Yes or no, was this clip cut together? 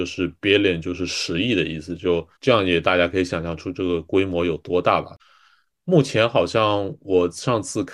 yes